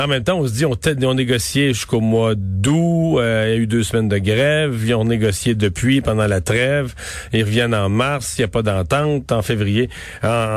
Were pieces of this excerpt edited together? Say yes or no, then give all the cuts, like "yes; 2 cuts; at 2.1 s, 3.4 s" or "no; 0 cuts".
no; 0 cuts